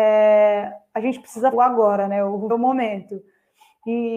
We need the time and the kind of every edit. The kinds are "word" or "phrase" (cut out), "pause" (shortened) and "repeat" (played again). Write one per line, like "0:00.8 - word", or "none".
0:01.5 - word
0:02.5 - word